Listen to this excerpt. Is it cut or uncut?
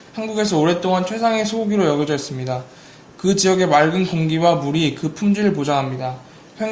uncut